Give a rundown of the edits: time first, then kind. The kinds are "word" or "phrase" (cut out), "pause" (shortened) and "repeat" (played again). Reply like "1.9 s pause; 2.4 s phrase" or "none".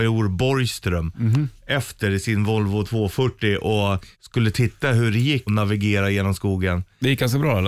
4.1 s pause; 5.5 s phrase